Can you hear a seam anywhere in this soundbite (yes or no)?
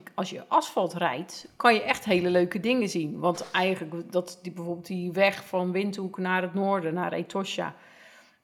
no